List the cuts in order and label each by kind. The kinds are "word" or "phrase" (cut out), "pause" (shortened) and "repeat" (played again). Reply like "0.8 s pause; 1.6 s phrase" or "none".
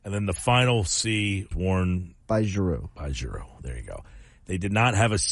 1.5 s word; 2.2 s pause